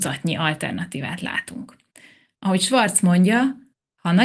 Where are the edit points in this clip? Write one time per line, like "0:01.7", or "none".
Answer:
none